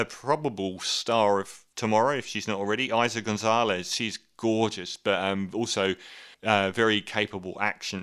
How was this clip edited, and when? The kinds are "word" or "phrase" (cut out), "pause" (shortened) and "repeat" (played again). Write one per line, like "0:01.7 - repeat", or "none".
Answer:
0:06.3 - pause

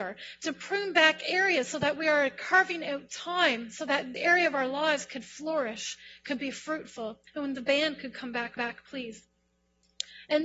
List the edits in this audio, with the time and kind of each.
0:04.1 - phrase
0:07.3 - pause
0:08.6 - repeat

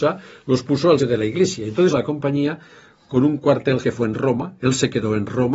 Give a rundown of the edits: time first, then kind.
0:01.0 - word
0:01.9 - word
0:03.8 - word

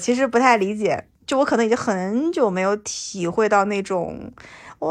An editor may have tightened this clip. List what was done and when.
0:01.1 - pause

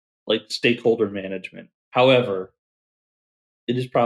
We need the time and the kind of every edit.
0:01.8 - pause

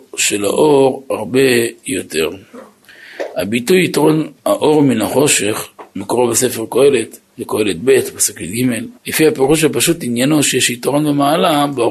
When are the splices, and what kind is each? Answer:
0:04.4 - pause
0:07.2 - pause
0:09.0 - pause

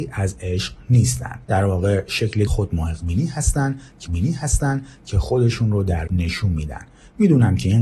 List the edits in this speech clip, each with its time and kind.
0:01.4 - pause
0:02.5 - phrase
0:04.1 - repeat
0:06.1 - word

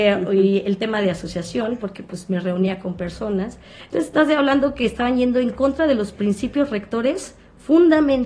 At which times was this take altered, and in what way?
none

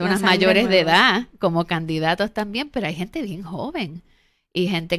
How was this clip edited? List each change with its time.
none

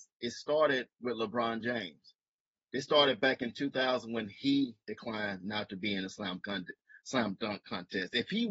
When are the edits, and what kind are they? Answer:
none

